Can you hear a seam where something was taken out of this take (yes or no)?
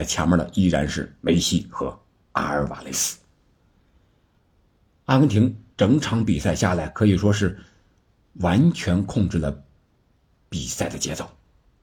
no